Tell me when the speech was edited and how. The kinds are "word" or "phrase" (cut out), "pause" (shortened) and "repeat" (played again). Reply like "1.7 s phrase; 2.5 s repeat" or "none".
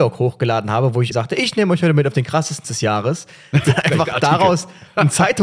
1.1 s word; 2.6 s word; 3.6 s word